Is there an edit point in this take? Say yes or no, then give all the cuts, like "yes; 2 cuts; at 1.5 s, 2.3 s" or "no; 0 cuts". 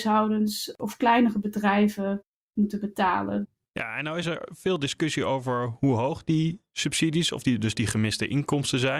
no; 0 cuts